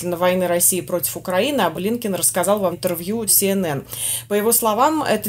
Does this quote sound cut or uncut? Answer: cut